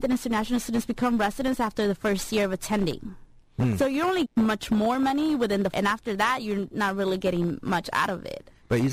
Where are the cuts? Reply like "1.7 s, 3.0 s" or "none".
4.2 s, 5.7 s